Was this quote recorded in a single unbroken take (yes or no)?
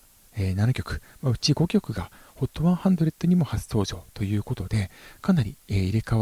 yes